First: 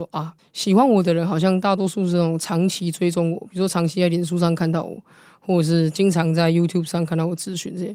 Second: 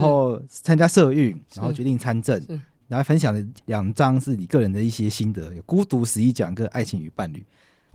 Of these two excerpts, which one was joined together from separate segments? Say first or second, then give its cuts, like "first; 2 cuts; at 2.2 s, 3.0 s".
second; 1 cut; at 3.6 s